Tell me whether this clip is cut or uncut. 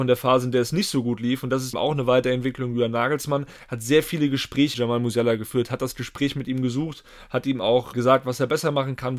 cut